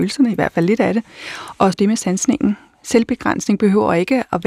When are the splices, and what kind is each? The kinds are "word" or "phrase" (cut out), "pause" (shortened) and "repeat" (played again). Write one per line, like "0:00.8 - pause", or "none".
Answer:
0:01.7 - phrase